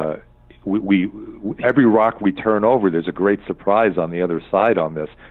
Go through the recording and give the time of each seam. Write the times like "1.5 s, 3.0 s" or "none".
1.6 s